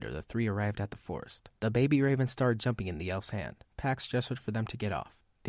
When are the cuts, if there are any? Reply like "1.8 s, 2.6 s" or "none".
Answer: 1.6 s, 3.7 s